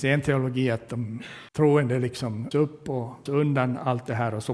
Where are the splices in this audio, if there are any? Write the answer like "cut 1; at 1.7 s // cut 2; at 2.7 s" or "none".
cut 1; at 1.5 s // cut 2; at 2.5 s // cut 3; at 3.3 s